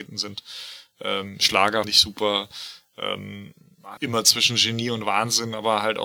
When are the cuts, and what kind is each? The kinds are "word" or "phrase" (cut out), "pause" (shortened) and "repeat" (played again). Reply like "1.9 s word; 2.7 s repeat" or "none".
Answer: 1.8 s word; 4.0 s word